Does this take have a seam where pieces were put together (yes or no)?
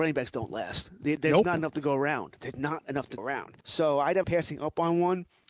yes